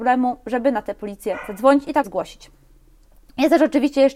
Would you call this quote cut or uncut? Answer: cut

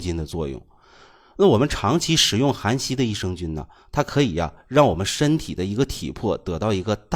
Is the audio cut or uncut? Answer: uncut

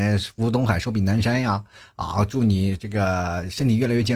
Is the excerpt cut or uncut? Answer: uncut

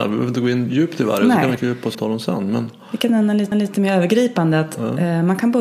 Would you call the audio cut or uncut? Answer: cut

